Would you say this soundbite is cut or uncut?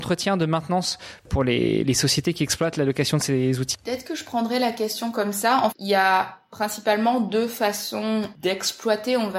cut